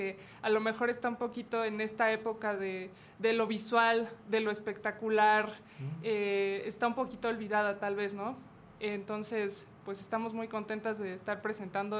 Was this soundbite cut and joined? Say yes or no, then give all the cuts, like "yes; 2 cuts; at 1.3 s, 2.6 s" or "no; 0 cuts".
no; 0 cuts